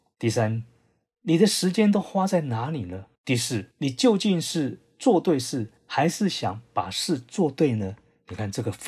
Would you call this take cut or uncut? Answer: cut